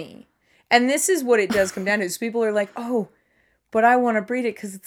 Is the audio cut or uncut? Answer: uncut